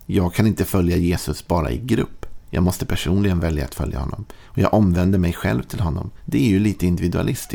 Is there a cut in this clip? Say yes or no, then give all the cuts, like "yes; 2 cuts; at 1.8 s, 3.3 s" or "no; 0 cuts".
no; 0 cuts